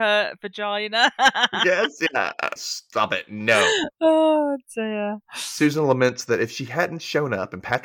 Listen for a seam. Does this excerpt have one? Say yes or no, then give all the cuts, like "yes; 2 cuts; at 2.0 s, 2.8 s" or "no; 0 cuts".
yes; 1 cut; at 2.6 s